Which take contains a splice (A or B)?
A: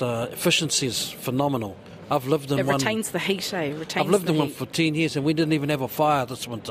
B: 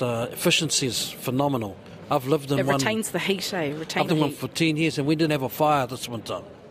B